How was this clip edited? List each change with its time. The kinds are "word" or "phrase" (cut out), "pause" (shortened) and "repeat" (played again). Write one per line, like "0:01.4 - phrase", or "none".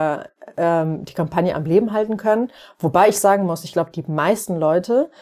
none